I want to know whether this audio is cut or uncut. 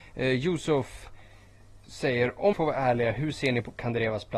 cut